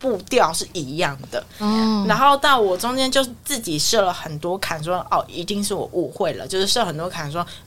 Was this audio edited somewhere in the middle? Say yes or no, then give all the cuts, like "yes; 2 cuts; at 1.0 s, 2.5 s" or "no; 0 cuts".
no; 0 cuts